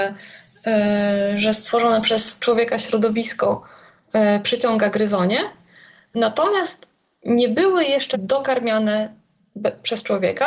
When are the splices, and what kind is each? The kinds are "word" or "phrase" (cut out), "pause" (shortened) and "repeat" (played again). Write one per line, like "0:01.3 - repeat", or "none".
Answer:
0:08.1 - word